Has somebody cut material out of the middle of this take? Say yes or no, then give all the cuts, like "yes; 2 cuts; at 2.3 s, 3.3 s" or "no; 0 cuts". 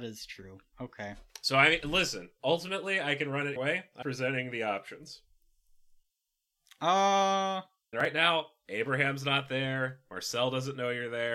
yes; 3 cuts; at 3.6 s, 4.0 s, 7.9 s